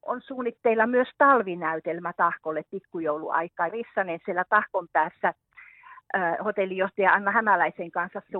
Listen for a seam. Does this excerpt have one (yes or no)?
yes